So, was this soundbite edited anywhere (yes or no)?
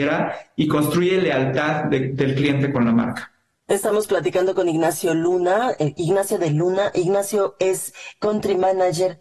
no